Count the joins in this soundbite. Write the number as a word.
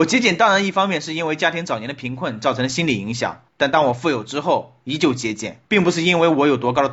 two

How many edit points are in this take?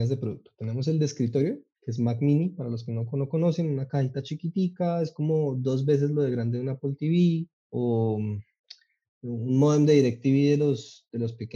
one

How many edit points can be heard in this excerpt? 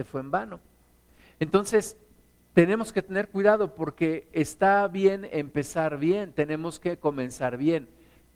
zero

